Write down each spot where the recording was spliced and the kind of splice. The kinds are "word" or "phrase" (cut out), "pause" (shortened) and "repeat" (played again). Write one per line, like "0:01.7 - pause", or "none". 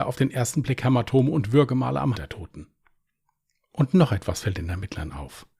0:02.1 - word